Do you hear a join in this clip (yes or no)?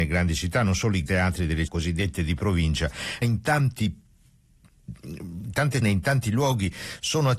yes